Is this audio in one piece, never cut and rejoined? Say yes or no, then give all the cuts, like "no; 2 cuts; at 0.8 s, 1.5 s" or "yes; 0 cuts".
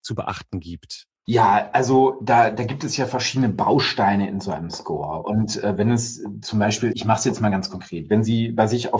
no; 1 cut; at 6.9 s